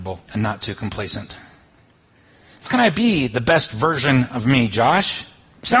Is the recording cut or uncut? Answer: cut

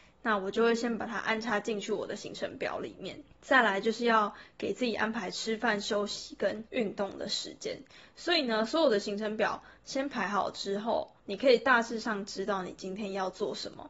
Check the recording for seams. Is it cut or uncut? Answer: cut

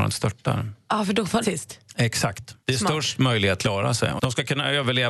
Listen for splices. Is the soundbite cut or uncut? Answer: cut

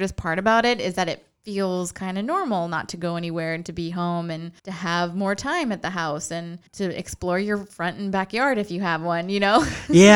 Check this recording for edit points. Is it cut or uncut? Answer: cut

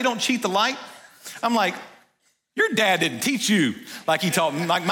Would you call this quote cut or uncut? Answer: uncut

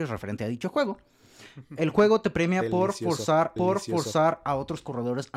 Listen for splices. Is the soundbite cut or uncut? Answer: cut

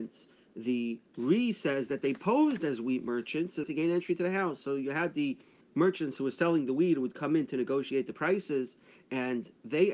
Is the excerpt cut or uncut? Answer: cut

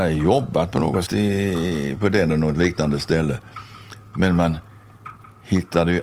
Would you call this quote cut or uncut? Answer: cut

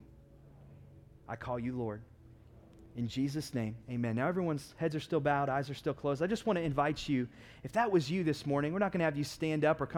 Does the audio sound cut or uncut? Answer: cut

